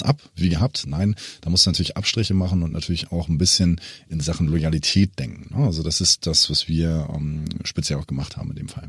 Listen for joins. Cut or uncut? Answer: uncut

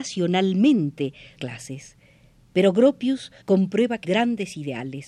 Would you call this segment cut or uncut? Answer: cut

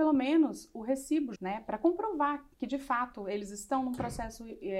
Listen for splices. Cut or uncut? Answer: cut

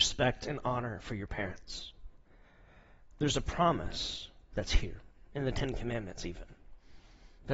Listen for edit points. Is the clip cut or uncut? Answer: uncut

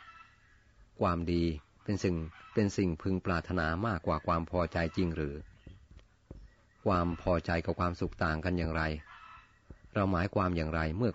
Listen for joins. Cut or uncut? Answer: uncut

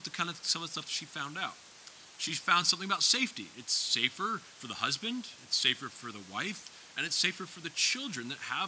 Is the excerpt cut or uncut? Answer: uncut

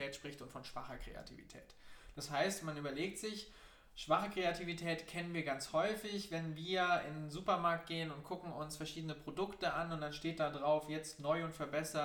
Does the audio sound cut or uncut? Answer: uncut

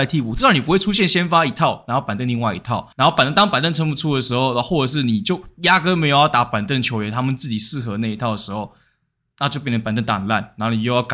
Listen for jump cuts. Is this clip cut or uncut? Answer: cut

